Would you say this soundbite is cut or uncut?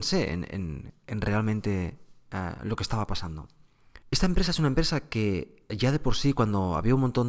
cut